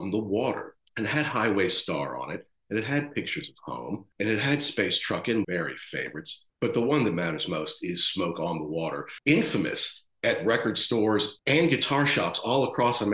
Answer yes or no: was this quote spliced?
yes